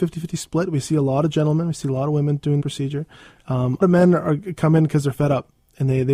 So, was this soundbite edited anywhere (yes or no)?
yes